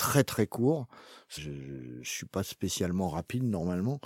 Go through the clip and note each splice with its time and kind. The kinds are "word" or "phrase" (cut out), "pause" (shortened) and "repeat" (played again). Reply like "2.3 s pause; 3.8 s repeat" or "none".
1.4 s word